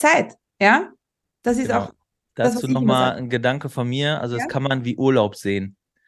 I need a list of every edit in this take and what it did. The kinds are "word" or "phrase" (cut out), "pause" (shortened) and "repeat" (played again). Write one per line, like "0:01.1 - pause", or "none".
none